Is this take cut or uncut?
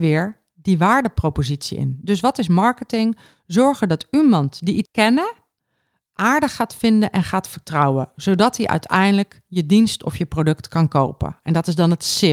cut